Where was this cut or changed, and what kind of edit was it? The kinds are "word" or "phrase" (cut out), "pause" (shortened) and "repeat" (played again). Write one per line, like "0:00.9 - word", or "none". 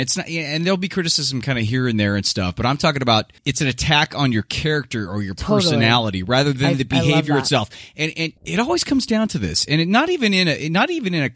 0:03.4 - pause
0:08.4 - pause